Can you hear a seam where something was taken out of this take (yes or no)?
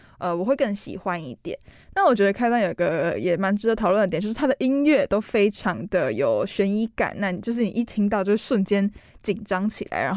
no